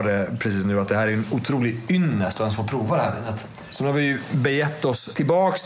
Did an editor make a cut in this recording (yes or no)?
no